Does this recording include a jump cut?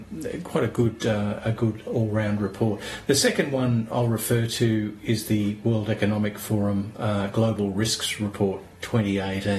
no; 0 cuts

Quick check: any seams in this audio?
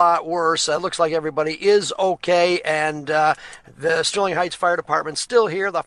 no; 0 cuts

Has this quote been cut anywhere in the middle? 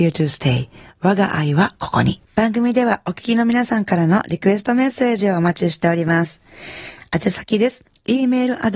yes; 1 cut; at 2.3 s

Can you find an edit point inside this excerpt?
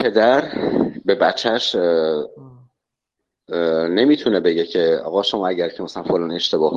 no; 0 cuts

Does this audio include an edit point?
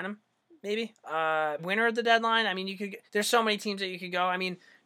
yes; 2 cuts; at 1.6 s, 3.1 s

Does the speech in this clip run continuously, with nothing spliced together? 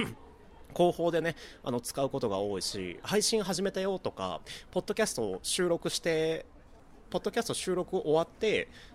no; 1 cut; at 7.0 s

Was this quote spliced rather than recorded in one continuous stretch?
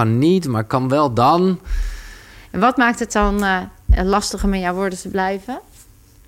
no; 0 cuts

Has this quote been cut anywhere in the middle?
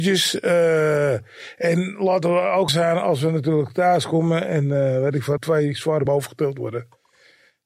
yes; 3 cuts; at 2.7 s, 5.4 s, 6.1 s

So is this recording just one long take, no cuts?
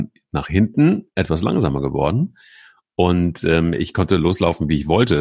yes; 0 cuts

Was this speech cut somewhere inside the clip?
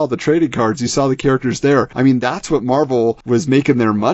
no; 0 cuts

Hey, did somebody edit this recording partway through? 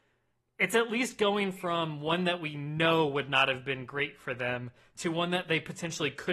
no; 0 cuts

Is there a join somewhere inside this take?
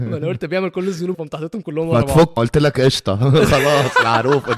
yes; 2 cuts; at 1.1 s, 2.4 s

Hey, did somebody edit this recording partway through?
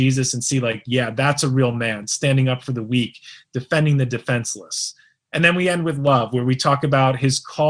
no; 0 cuts

